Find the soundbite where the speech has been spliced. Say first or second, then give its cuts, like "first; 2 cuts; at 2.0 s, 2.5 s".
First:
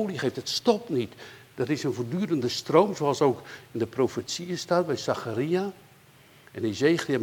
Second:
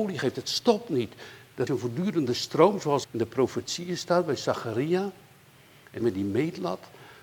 second; 3 cuts; at 1.7 s, 3.0 s, 6.0 s